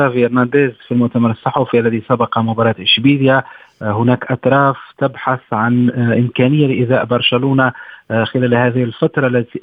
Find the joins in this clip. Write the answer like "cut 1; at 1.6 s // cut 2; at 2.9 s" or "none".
none